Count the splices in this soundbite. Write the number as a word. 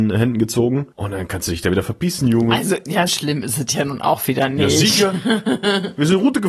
two